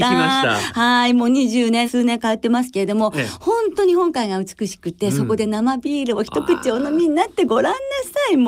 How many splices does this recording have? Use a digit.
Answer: 1